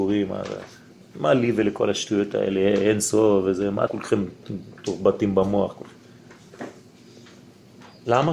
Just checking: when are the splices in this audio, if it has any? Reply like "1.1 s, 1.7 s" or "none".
3.9 s